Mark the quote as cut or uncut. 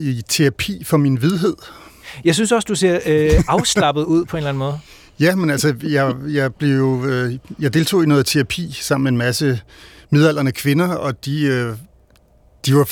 uncut